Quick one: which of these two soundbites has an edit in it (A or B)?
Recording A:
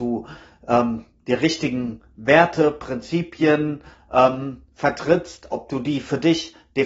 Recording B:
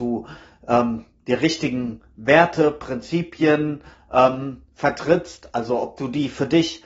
A